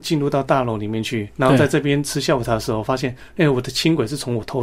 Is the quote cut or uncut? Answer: uncut